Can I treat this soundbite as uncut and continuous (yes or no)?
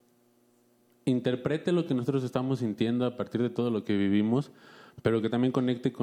yes